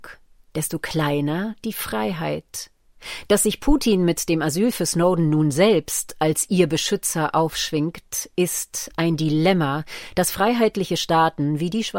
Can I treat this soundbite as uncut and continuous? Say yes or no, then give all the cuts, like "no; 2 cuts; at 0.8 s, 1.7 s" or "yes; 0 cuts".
yes; 0 cuts